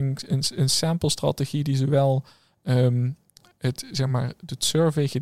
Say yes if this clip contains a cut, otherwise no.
no